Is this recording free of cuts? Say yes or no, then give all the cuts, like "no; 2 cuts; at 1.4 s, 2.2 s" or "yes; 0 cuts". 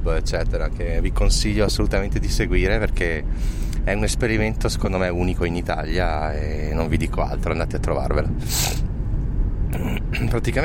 yes; 0 cuts